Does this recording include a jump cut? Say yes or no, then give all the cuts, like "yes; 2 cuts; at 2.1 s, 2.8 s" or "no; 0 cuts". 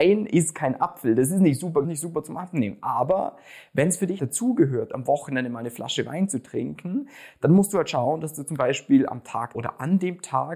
yes; 3 cuts; at 1.8 s, 4.2 s, 9.5 s